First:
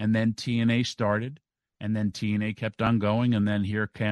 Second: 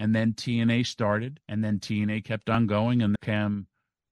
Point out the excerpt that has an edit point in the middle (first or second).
second